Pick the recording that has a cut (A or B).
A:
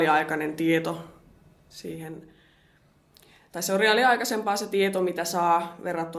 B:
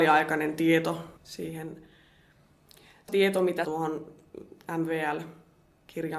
B